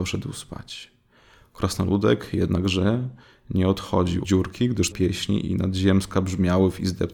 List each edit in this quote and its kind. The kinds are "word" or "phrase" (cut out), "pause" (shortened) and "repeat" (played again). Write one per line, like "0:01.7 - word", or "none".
0:04.2 - word
0:04.9 - word
0:06.1 - word